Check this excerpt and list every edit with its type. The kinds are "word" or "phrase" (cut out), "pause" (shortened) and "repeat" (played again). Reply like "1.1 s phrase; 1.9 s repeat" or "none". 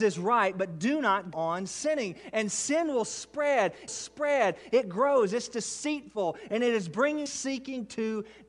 1.3 s word; 3.9 s repeat; 7.3 s phrase